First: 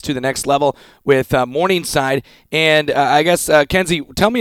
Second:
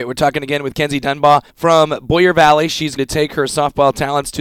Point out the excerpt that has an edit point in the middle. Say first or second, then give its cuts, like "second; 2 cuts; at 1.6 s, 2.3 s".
second; 2 cuts; at 1.5 s, 3.0 s